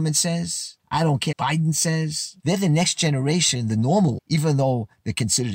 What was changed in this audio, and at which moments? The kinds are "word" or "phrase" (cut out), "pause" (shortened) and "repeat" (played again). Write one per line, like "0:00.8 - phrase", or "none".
0:01.3 - word
0:02.4 - pause
0:04.2 - word